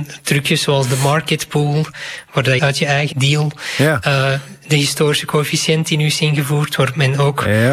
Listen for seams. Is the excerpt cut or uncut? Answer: cut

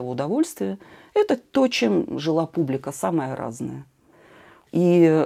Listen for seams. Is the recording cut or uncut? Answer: uncut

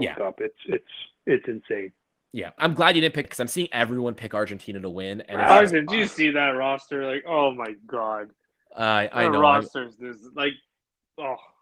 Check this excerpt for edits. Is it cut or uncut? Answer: cut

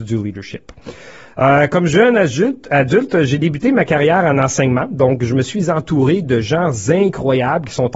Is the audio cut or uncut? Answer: uncut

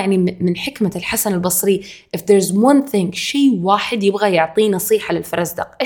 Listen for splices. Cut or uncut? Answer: uncut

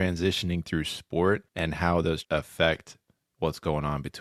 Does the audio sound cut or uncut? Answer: cut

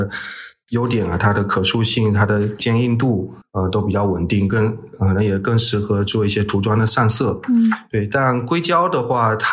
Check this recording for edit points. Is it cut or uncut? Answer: uncut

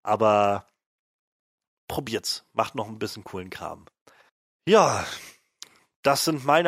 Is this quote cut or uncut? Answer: cut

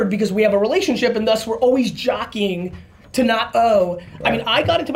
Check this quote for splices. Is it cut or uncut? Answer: uncut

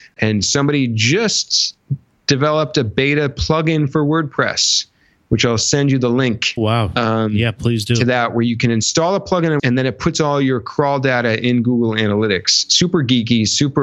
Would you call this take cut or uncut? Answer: cut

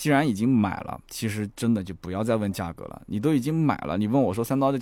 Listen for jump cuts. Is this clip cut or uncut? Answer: cut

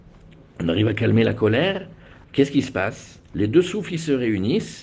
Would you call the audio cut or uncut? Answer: cut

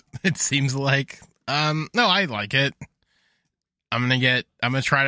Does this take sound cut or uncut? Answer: uncut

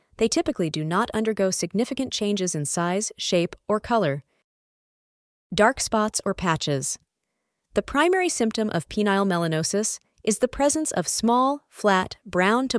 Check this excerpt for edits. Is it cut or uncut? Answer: uncut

